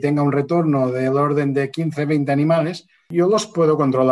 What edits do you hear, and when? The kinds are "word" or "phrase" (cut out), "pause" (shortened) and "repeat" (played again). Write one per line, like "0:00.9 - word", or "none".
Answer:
none

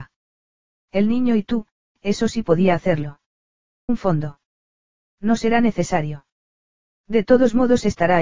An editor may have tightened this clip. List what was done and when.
0:03.9 - word

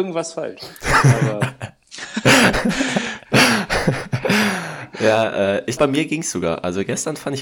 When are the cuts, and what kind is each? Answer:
0:05.8 - word

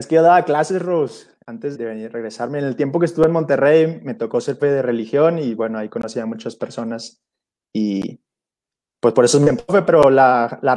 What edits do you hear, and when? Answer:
0:01.7 - word
0:04.6 - word

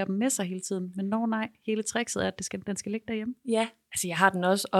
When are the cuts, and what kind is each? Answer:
none

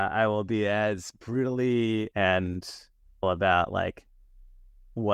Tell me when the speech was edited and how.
0:02.1 - word
0:03.2 - word

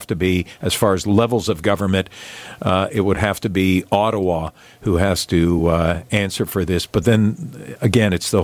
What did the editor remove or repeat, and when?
none

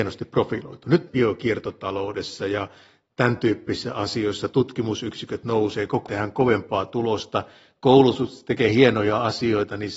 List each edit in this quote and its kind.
0:01.1 - phrase
0:06.1 - word

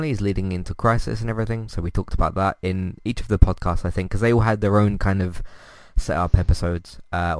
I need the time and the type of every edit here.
none

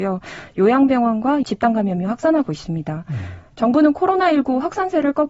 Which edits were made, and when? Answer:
0:01.4 - word

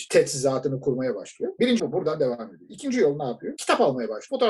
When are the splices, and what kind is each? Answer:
0:01.8 - word

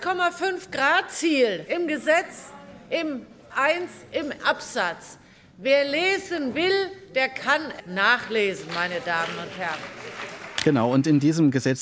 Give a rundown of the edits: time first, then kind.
0:01.7 - word
0:03.5 - word
0:04.4 - word
0:07.8 - word

